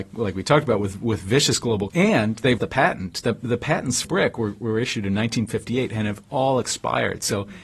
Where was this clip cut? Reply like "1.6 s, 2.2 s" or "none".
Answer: 1.9 s, 2.6 s, 4.0 s